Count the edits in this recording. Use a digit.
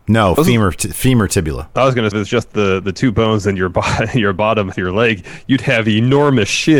2